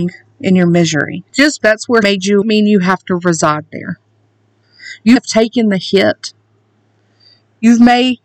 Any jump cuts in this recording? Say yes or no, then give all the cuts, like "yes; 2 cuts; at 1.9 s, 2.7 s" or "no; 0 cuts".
yes; 4 cuts; at 1.6 s, 2.0 s, 2.4 s, 5.2 s